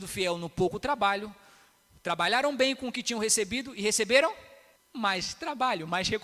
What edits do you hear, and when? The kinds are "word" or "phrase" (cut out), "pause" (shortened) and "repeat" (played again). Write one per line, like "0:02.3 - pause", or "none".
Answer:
none

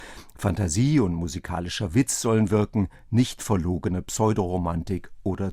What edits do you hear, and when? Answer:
none

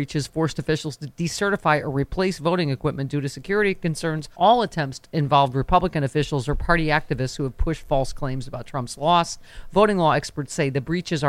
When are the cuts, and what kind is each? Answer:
0:04.3 - pause

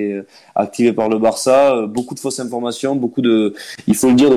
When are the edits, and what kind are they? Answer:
none

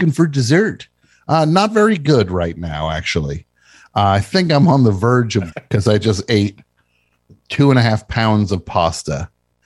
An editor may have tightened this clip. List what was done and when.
0:05.5 - word

